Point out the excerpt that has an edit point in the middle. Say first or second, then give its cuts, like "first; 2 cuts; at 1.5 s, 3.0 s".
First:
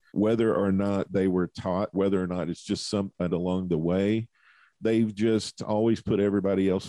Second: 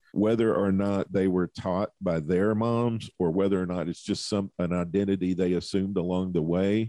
first; 2 cuts; at 1.9 s, 3.3 s